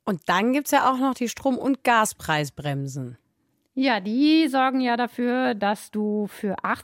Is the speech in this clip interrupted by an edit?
no; 0 cuts

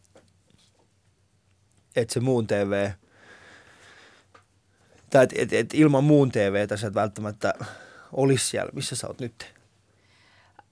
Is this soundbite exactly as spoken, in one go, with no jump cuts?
yes; 0 cuts

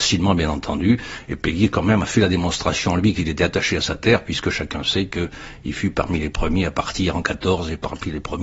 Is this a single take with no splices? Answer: yes; 0 cuts

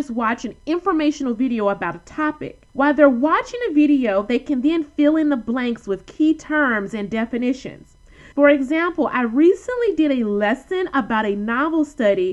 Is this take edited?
yes; 2 cuts; at 2.7 s, 8.3 s

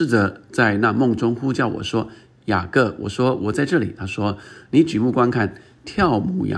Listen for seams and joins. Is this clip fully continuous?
yes; 0 cuts

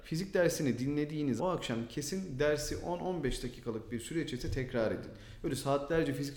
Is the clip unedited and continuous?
no; 1 cut; at 1.4 s

